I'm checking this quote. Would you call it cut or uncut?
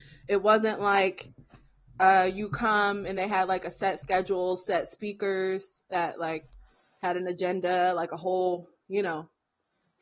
uncut